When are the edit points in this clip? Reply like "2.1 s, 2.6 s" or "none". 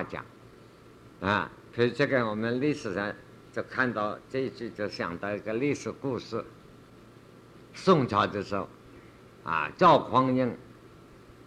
7.6 s